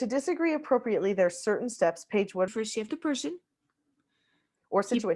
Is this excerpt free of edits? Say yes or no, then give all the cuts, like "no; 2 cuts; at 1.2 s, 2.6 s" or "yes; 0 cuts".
no; 2 cuts; at 2.5 s, 2.9 s